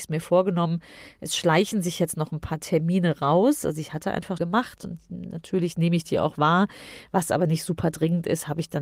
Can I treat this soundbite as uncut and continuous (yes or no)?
no